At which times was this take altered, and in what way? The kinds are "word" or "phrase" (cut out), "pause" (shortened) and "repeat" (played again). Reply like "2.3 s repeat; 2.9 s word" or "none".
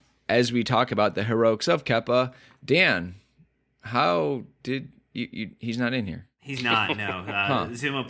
none